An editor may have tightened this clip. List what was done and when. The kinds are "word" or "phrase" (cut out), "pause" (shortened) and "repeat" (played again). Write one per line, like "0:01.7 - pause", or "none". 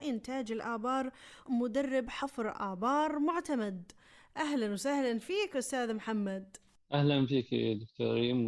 0:01.5 - word